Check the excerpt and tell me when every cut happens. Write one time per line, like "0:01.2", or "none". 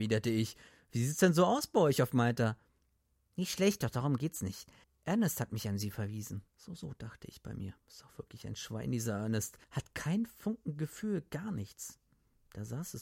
0:04.8
0:06.5
0:07.8
0:09.6